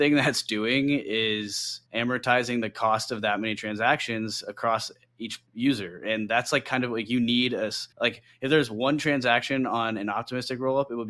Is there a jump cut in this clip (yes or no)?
yes